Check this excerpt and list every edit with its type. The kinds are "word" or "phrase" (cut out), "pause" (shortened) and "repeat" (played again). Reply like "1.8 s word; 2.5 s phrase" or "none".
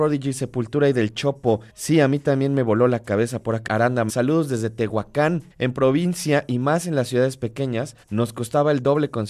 1.7 s pause; 3.7 s word; 4.1 s word; 5.5 s pause; 8.0 s pause